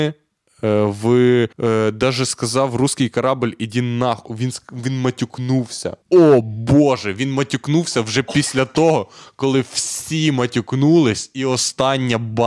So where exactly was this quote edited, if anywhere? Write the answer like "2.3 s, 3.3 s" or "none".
1.5 s, 6.0 s